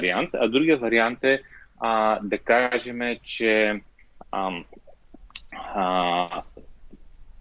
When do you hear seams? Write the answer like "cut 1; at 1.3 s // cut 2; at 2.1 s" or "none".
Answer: none